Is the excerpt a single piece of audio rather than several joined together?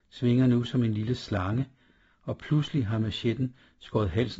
yes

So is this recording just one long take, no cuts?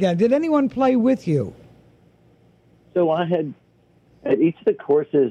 yes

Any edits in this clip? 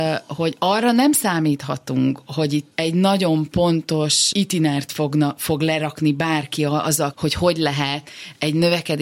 yes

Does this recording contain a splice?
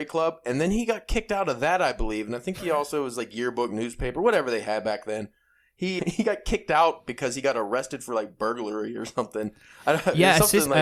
yes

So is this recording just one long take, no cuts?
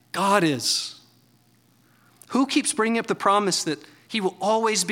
yes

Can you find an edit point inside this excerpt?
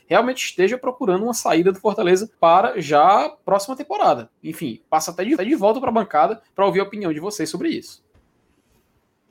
yes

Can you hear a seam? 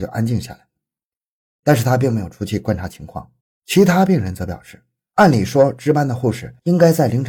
yes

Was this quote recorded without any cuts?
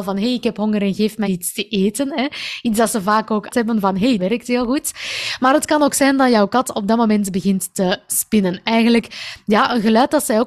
no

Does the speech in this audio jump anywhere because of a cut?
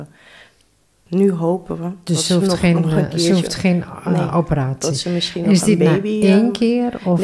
no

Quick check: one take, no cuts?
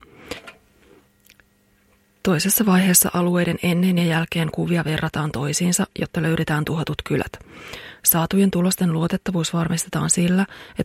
yes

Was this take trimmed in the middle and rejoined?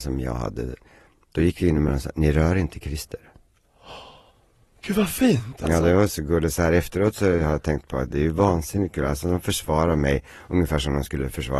no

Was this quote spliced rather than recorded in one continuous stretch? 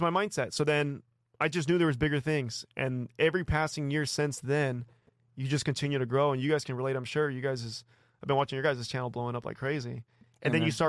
no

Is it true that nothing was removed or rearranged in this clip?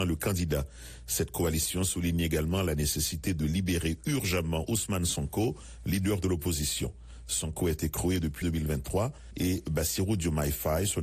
no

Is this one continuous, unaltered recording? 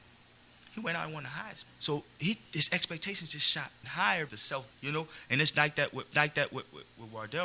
no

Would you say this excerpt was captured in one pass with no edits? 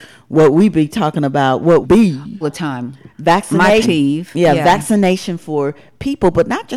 no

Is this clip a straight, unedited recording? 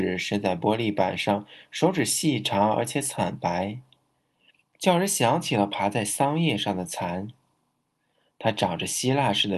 yes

